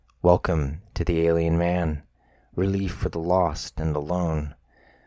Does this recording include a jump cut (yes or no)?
no